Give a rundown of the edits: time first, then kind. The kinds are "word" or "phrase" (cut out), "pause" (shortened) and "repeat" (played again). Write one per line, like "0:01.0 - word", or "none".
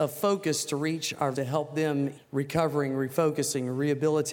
0:01.3 - word
0:02.1 - word